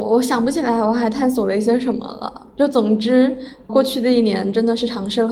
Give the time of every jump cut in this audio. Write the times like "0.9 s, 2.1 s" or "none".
3.7 s

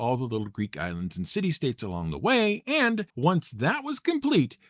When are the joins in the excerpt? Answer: 3.1 s

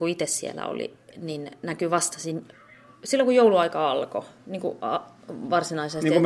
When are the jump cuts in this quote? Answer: none

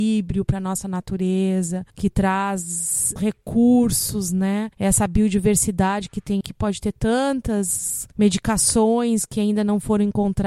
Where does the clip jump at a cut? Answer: 1.9 s, 3.2 s, 4.7 s, 6.4 s, 8.1 s

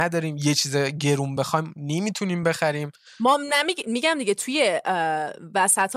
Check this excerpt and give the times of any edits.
none

